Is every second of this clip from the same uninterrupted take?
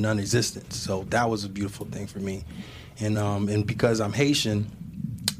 yes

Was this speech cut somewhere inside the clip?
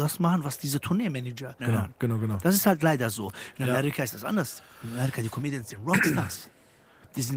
yes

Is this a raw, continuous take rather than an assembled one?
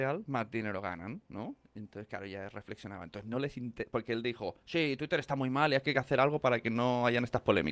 yes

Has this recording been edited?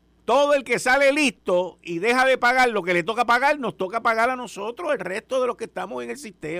no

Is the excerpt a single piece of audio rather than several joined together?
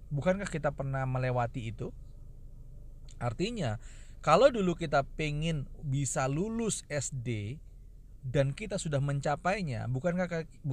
yes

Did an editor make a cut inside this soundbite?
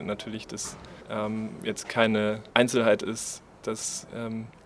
yes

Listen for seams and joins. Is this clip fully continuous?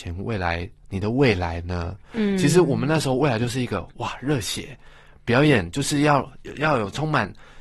yes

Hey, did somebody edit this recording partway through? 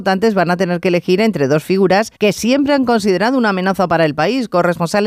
yes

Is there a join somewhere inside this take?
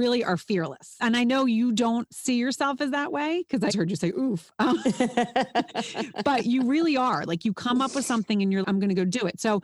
yes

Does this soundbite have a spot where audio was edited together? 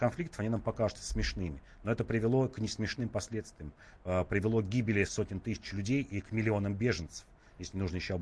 yes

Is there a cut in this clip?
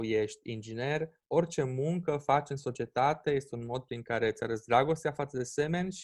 no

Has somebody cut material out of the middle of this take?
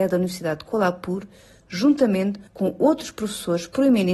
yes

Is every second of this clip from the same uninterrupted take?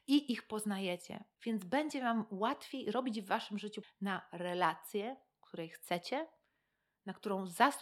no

